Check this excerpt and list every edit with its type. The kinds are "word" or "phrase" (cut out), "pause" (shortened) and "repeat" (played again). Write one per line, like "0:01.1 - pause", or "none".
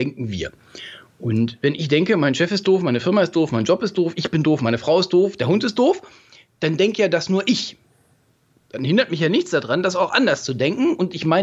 none